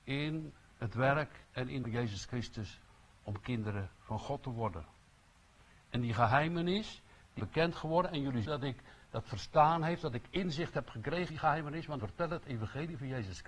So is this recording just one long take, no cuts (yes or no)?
no